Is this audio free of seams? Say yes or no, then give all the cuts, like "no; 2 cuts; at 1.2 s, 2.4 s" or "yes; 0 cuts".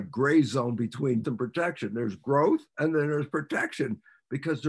no; 2 cuts; at 1.2 s, 2.7 s